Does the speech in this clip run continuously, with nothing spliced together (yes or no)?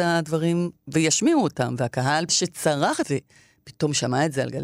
no